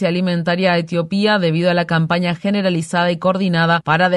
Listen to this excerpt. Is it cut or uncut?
uncut